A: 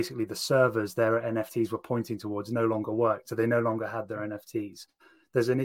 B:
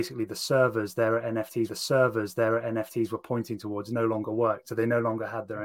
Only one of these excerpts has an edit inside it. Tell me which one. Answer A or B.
B